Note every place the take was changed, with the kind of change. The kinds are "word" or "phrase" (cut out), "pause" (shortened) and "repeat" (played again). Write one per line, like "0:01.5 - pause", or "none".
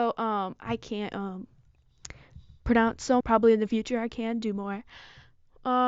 0:03.2 - phrase